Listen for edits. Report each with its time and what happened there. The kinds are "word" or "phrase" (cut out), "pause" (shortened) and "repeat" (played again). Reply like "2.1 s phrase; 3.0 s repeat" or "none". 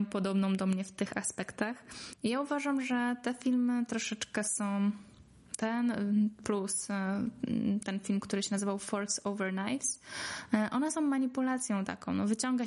none